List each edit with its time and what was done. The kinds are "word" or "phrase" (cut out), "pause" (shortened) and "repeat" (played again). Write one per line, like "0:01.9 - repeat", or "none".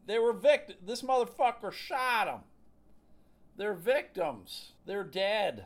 0:04.8 - pause